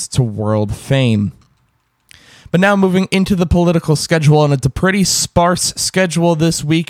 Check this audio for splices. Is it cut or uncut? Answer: uncut